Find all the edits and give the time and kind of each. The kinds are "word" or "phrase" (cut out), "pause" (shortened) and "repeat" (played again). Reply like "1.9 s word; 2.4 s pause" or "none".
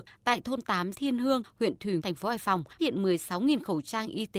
0.9 s word; 2.0 s word; 2.8 s word